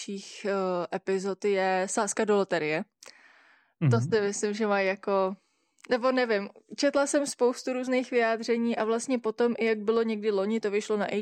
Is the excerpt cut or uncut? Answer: uncut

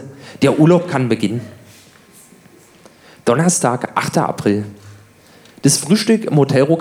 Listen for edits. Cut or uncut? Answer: uncut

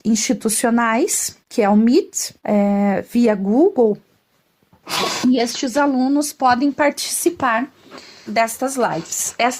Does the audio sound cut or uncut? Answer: cut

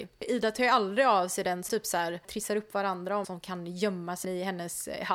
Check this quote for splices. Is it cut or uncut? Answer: cut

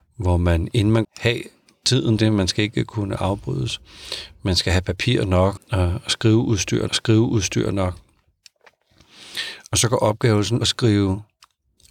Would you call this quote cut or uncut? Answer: cut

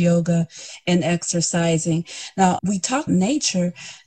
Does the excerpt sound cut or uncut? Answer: cut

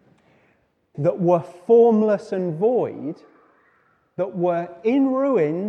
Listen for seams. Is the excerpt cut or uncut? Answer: cut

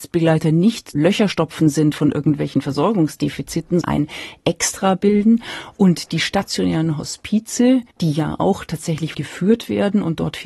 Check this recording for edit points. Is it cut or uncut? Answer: cut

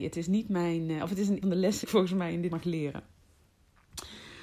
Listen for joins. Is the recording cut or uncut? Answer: cut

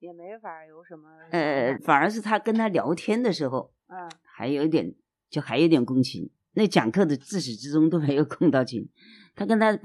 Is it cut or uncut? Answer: cut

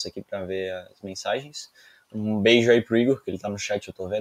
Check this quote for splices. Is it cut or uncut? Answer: uncut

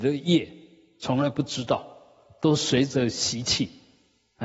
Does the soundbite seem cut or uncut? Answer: uncut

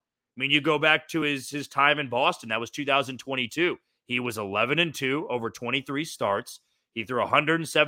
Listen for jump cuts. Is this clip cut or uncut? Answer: uncut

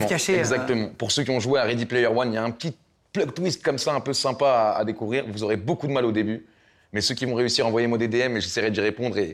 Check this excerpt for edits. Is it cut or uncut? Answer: uncut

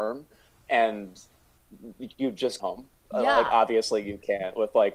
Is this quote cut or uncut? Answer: cut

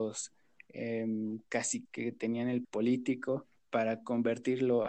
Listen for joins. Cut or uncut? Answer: cut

